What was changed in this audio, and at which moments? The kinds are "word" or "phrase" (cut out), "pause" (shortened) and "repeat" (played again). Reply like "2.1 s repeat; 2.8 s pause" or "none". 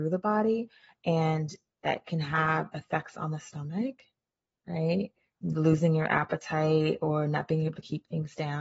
none